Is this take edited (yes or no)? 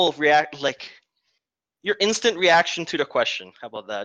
no